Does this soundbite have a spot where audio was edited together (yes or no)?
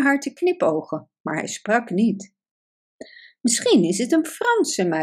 no